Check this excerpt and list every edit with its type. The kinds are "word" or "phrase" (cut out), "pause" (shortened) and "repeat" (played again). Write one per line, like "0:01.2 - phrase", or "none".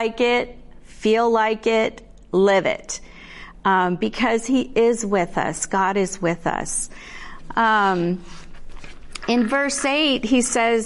none